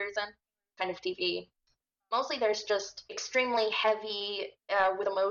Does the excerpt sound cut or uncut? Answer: uncut